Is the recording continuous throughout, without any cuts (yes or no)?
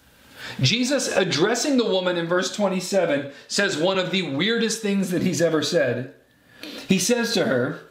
yes